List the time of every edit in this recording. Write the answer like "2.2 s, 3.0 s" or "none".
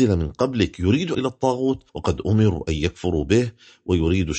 1.1 s, 1.9 s